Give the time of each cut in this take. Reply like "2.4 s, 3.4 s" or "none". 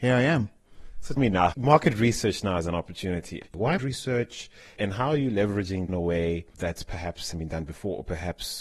1.2 s, 3.8 s, 5.9 s, 7.3 s